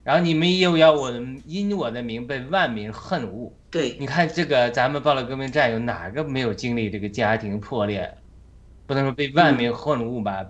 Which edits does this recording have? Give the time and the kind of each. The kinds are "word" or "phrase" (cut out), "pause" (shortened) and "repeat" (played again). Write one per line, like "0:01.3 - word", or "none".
0:03.6 - pause